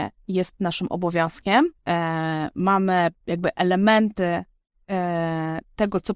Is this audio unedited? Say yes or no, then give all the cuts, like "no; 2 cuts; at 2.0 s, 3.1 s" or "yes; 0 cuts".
no; 2 cuts; at 1.8 s, 3.2 s